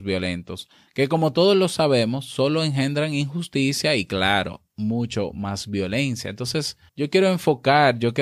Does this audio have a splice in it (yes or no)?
yes